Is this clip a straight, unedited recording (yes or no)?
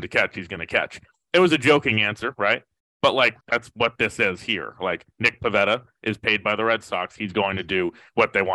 no